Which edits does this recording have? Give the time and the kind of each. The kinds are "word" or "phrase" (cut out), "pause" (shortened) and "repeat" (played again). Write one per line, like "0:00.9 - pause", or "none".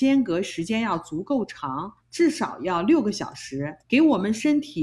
0:02.0 - pause
0:03.8 - pause